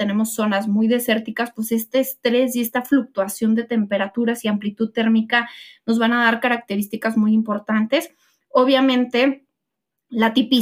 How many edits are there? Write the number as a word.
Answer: zero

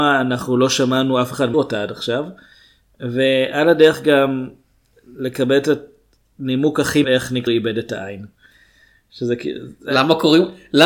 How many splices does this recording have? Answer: three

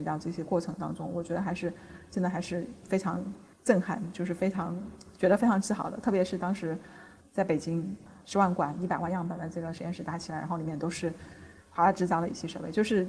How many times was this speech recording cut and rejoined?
one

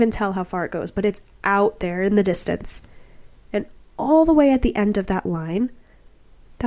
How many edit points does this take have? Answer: zero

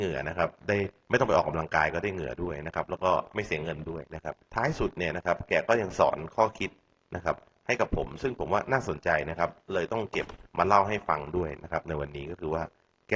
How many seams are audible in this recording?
three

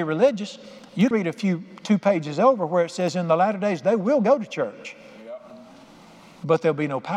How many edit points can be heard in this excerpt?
one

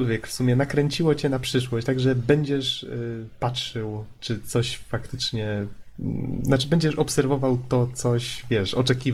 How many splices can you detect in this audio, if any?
zero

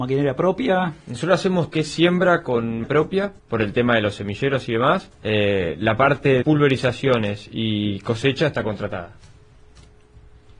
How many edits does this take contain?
five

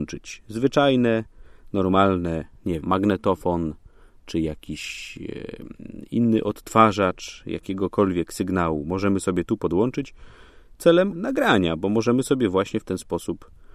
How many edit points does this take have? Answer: two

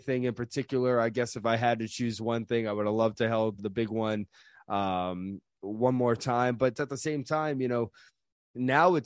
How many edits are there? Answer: one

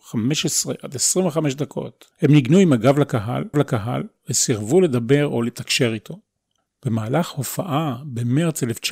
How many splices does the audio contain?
three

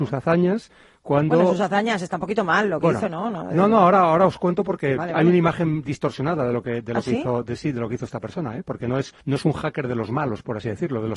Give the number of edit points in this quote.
one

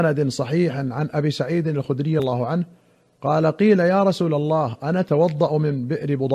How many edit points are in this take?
one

